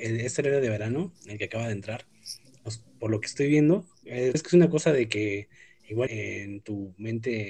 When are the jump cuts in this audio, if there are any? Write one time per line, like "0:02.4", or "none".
0:04.0
0:04.3
0:06.1